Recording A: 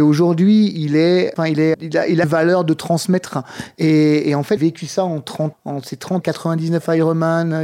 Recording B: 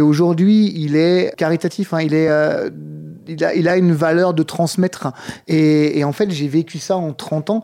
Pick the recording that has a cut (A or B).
A